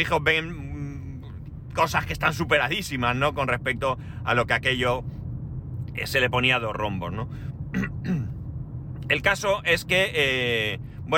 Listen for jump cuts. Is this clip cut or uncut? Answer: uncut